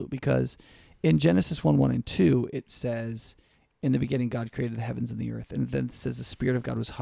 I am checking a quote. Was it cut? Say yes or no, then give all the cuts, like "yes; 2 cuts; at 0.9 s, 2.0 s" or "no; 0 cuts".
no; 0 cuts